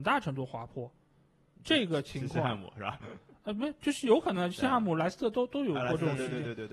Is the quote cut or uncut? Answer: uncut